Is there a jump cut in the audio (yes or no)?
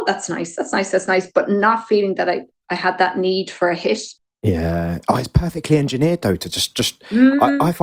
no